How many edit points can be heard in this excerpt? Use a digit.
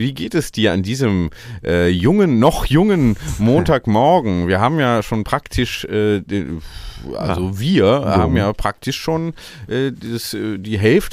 0